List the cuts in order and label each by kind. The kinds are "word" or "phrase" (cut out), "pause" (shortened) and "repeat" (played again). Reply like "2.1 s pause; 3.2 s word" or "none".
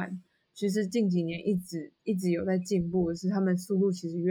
2.0 s pause